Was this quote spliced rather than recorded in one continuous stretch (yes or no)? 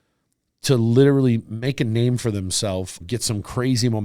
yes